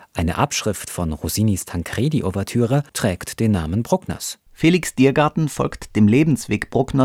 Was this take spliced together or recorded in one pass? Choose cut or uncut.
cut